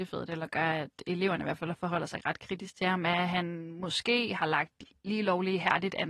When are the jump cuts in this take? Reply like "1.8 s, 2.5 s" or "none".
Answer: none